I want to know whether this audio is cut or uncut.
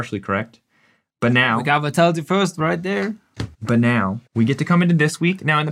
cut